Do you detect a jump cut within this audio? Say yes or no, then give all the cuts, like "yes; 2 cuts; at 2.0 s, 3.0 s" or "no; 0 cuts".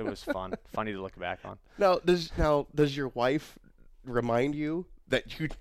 no; 0 cuts